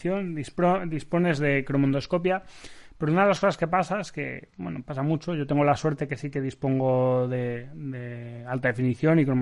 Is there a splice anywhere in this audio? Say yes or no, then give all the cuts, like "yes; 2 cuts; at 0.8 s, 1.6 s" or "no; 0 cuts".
no; 0 cuts